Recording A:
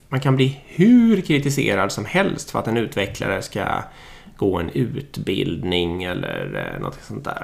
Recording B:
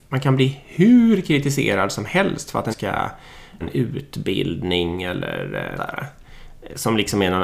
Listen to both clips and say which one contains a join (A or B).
B